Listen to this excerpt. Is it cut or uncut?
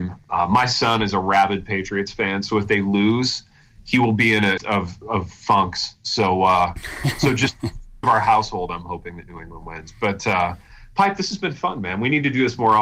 cut